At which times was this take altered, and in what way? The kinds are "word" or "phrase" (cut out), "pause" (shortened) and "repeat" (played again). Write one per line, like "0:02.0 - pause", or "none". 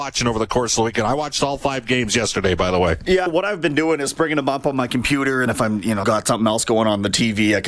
0:03.3 - word
0:05.5 - word
0:06.0 - word